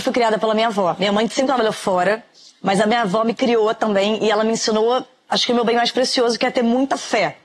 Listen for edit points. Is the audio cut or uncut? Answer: uncut